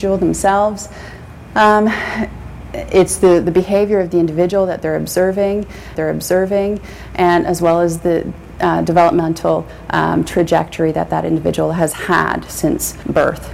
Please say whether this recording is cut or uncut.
cut